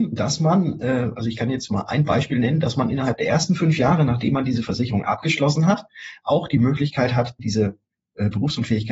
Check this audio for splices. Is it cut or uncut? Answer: cut